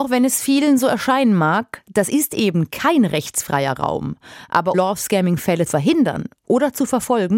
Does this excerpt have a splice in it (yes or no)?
yes